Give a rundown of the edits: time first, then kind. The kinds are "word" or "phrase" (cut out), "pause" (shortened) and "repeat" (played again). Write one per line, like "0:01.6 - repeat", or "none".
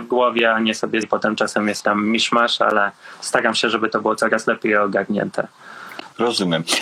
0:01.0 - word
0:01.8 - word